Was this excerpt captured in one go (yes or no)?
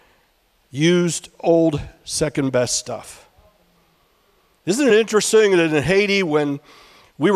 yes